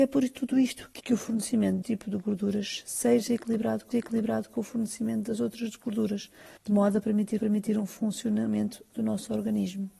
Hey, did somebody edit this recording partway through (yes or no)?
yes